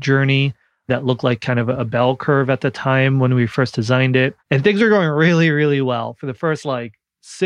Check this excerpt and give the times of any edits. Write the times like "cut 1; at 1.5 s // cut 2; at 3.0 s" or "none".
cut 1; at 4.4 s